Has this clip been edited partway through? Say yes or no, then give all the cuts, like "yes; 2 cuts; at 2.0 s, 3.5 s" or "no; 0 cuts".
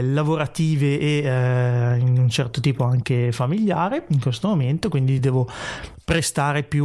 no; 0 cuts